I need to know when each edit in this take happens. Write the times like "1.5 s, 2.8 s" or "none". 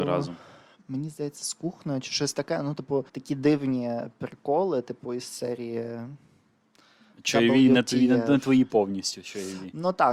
3.1 s